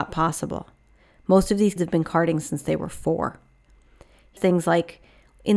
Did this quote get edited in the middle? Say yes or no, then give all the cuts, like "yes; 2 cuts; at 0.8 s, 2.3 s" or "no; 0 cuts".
yes; 2 cuts; at 1.8 s, 4.4 s